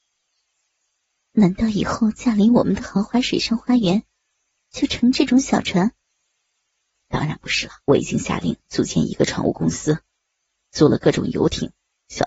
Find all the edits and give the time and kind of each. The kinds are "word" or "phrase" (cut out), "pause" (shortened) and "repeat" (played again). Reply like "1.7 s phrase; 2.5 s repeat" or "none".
7.8 s pause

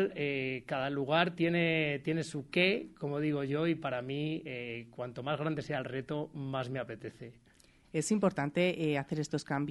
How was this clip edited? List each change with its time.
none

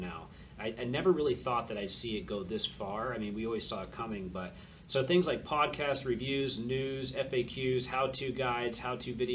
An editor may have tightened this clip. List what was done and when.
none

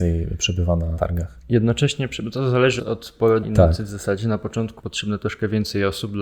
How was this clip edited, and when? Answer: 1.0 s word; 2.8 s word; 3.4 s word; 4.8 s word

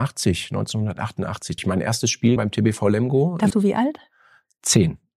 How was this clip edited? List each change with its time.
1.6 s word; 2.4 s word; 3.5 s word

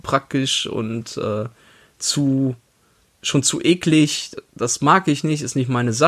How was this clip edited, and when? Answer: none

